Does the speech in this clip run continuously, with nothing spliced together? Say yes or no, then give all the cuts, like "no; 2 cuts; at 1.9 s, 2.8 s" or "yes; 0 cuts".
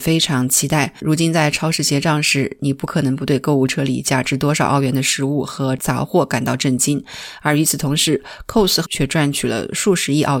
no; 1 cut; at 8.9 s